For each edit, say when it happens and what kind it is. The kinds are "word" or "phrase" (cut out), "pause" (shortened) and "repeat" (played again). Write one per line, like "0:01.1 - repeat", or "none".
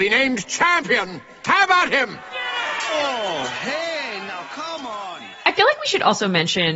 none